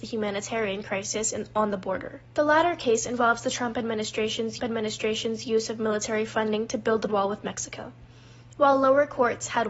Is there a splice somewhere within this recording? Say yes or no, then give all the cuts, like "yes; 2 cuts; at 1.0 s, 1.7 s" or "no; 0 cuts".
yes; 3 cuts; at 2.3 s, 4.6 s, 7.1 s